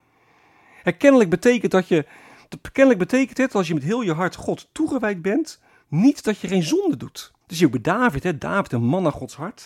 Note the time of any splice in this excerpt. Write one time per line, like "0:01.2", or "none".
0:05.7
0:07.4